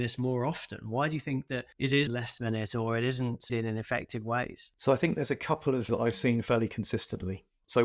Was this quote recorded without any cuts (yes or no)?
no